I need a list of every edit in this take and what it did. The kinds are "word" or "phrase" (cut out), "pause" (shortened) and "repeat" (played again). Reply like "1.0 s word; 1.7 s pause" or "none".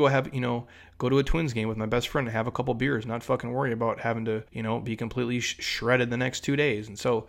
4.5 s pause